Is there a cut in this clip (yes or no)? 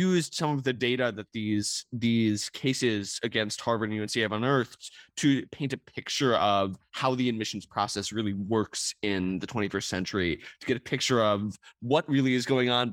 no